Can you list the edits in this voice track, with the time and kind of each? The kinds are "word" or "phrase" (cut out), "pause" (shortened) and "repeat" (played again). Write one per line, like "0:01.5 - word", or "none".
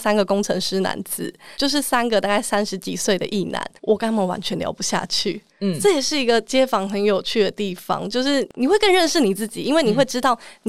0:01.5 - pause
0:03.8 - pause
0:05.5 - pause